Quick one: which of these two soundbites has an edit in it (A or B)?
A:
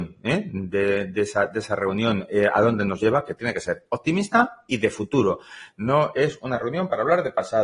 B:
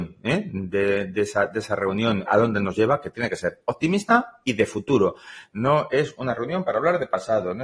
B